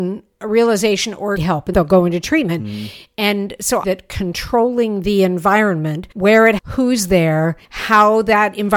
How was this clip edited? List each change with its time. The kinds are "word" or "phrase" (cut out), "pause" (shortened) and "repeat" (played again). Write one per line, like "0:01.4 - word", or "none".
0:01.4 - phrase
0:01.7 - word
0:03.8 - phrase
0:06.1 - pause
0:06.6 - word
0:07.6 - pause